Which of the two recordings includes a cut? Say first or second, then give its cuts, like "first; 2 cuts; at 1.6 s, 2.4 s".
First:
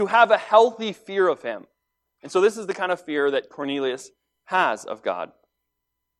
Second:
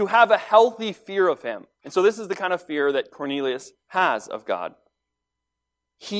second; 2 cuts; at 1.7 s, 3.8 s